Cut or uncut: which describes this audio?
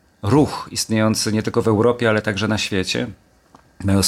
uncut